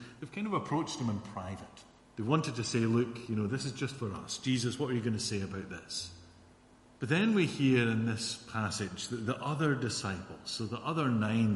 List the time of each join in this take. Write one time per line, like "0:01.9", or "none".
0:02.0
0:06.5